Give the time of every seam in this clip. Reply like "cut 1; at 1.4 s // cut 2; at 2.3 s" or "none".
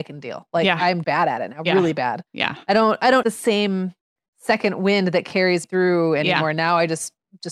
cut 1; at 1.0 s // cut 2; at 2.3 s // cut 3; at 3.2 s // cut 4; at 5.6 s